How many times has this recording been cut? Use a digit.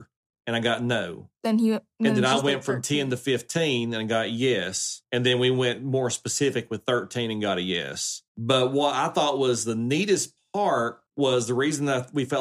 4